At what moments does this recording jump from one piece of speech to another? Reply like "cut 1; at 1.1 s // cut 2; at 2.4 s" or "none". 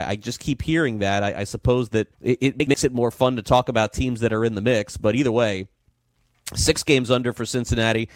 cut 1; at 2.1 s